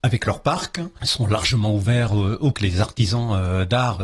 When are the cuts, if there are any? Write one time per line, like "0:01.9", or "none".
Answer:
0:02.5